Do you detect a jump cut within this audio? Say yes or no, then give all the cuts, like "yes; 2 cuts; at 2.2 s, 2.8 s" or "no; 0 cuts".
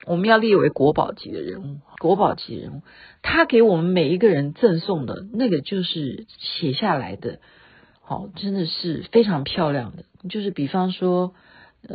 yes; 1 cut; at 1.9 s